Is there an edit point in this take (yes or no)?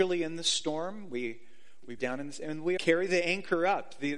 yes